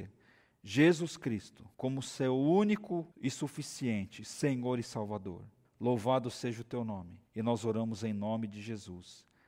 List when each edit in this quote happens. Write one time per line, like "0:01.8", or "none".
0:01.7
0:03.1
0:05.6
0:07.3